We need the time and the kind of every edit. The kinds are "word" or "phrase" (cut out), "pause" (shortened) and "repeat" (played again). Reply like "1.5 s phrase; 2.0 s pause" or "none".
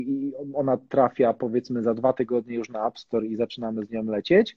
none